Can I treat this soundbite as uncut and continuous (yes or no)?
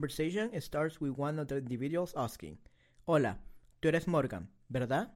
yes